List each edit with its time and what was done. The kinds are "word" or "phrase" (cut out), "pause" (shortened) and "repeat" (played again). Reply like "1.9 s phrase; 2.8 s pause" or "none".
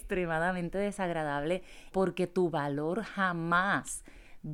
1.9 s phrase